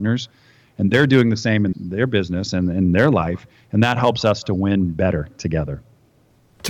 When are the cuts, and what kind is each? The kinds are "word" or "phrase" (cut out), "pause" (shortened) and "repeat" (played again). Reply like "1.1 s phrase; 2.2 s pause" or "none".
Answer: 1.7 s word